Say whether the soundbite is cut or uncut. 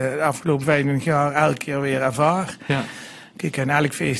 uncut